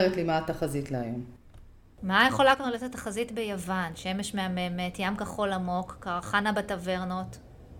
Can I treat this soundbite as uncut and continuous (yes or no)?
yes